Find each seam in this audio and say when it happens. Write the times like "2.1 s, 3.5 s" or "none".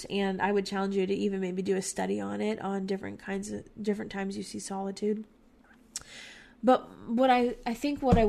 none